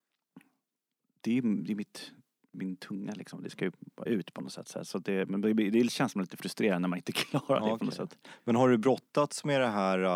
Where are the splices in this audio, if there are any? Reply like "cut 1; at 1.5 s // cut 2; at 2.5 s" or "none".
cut 1; at 4.1 s